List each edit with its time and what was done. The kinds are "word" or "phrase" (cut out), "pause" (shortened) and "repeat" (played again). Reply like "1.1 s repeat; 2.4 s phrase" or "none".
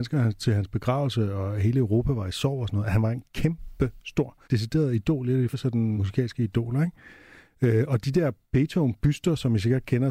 4.4 s pause; 5.5 s word; 6.0 s word